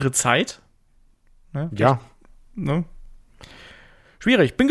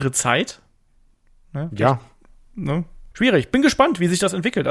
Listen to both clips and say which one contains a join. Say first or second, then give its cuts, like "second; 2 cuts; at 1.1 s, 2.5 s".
second; 1 cut; at 3.1 s